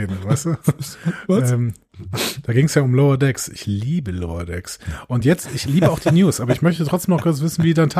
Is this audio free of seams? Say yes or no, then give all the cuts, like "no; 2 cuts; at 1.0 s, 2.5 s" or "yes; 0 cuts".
yes; 0 cuts